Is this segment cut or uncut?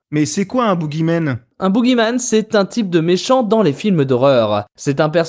uncut